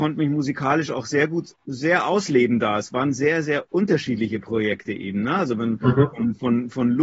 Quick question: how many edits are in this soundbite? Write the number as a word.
zero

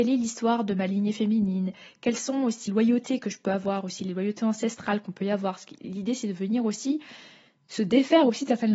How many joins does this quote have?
one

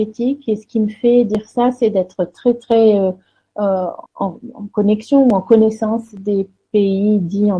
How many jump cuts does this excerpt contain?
one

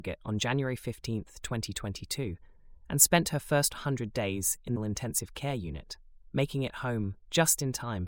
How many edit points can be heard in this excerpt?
one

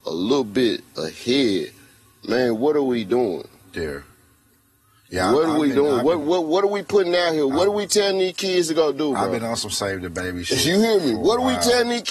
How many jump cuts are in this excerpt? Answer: zero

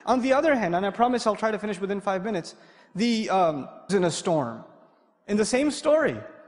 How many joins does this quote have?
one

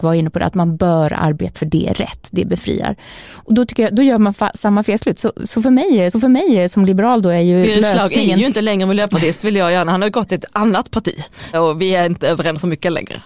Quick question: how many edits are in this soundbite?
three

